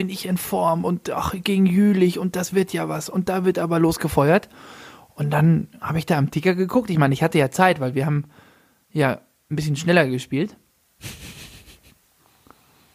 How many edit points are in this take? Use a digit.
0